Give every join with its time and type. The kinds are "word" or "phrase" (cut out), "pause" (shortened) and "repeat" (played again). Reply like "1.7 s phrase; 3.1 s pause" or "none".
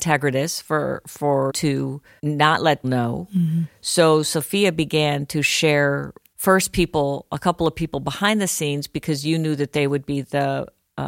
1.5 s word; 2.2 s word; 2.8 s word; 6.3 s word